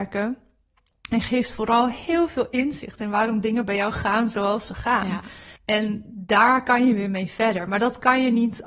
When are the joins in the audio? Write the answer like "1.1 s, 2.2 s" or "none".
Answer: 5.6 s